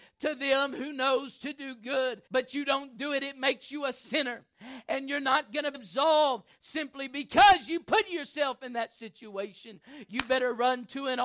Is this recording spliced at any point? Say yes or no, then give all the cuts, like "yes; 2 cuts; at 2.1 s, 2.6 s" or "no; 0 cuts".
yes; 2 cuts; at 2.3 s, 5.7 s